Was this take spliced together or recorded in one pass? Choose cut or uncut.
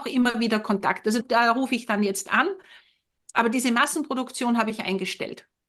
cut